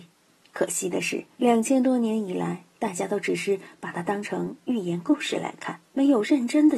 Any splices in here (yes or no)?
yes